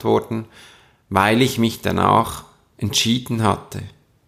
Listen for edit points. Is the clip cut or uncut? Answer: uncut